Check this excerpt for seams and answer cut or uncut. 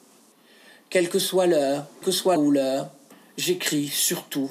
cut